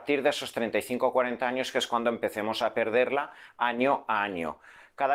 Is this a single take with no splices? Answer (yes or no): yes